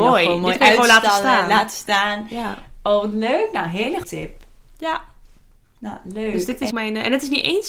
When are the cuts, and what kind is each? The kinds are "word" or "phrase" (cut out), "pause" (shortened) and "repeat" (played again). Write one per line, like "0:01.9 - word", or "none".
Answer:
0:04.0 - word
0:06.7 - word